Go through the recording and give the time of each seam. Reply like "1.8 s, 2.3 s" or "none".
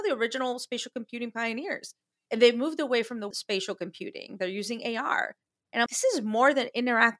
3.3 s, 5.9 s